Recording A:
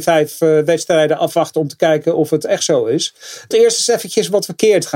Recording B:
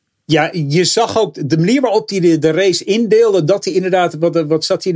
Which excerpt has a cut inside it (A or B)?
A